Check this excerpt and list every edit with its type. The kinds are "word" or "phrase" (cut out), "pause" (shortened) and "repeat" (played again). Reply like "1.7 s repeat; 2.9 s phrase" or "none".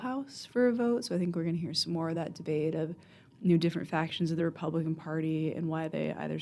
none